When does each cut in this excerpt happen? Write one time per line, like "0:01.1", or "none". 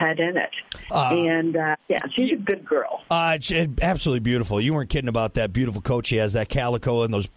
0:01.8